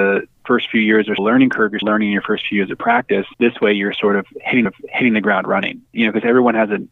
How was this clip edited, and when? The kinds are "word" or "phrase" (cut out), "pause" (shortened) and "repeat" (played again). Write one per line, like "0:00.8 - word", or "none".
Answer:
0:01.2 - word
0:01.8 - word
0:03.3 - pause
0:04.7 - repeat
0:05.9 - pause